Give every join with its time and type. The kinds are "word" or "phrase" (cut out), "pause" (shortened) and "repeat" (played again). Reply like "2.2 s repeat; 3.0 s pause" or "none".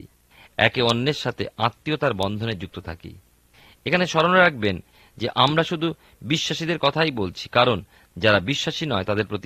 none